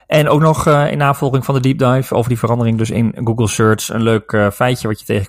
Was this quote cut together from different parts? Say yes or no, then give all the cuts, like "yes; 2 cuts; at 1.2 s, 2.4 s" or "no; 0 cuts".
no; 0 cuts